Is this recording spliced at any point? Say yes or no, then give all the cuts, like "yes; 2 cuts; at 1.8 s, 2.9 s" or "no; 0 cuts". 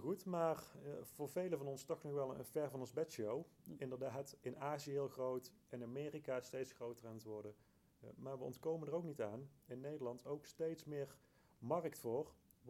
no; 0 cuts